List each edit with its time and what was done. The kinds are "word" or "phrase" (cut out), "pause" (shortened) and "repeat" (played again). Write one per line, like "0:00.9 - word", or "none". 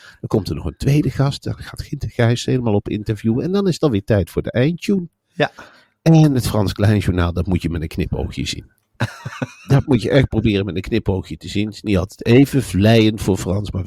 none